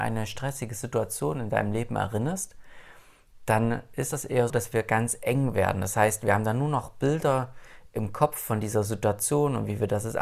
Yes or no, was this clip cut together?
yes